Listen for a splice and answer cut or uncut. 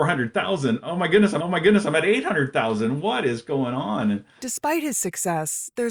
cut